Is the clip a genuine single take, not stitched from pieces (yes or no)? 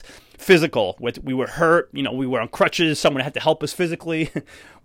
yes